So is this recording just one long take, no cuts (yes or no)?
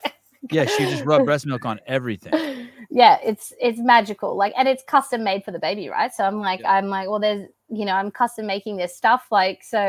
yes